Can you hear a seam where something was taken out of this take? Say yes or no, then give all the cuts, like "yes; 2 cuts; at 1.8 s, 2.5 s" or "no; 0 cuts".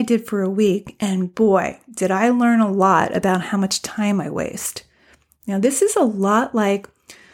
no; 0 cuts